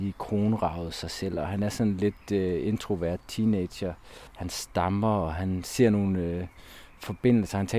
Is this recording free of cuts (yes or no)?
no